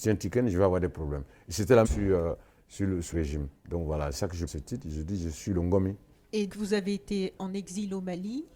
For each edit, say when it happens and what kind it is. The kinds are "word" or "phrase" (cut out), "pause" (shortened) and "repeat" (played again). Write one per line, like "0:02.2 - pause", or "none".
0:01.8 - phrase
0:03.1 - word
0:03.6 - pause
0:04.1 - phrase
0:04.5 - phrase
0:06.5 - word
0:07.4 - word